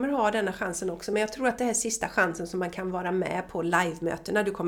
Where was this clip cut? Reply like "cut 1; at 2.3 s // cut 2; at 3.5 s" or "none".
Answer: none